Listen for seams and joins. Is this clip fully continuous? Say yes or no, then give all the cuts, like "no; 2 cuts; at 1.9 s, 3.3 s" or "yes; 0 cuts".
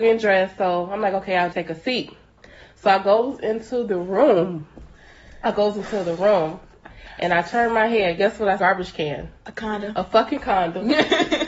no; 2 cuts; at 1.5 s, 8.6 s